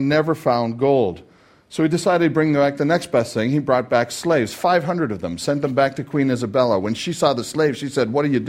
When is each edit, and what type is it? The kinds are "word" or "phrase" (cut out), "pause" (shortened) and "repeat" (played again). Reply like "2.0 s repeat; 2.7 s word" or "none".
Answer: none